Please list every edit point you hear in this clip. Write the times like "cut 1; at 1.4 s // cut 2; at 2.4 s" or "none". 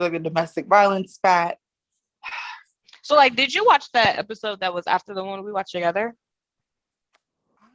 none